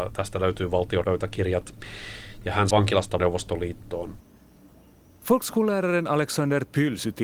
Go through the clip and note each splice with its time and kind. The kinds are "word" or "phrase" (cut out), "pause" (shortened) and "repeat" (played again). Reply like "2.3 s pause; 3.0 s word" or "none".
1.0 s word; 2.7 s word; 3.2 s phrase